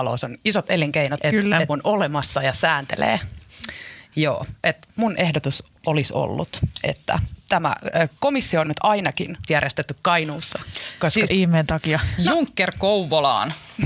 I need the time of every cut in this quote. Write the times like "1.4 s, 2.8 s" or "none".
1.2 s, 1.7 s, 7.4 s, 8.7 s, 9.5 s, 11.3 s

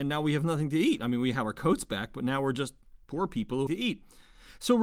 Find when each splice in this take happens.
3.0 s, 3.7 s

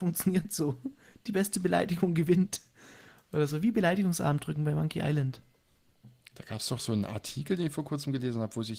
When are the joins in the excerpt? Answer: none

